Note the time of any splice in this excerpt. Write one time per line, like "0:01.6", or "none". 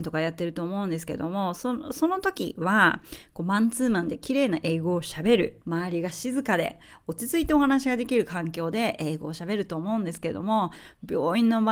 0:05.6